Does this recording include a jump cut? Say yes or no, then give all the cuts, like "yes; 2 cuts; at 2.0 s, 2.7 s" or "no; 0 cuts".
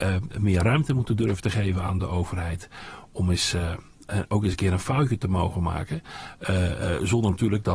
no; 0 cuts